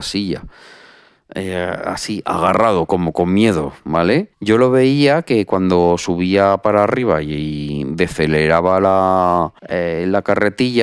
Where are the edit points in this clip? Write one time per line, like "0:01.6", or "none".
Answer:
0:04.3
0:09.6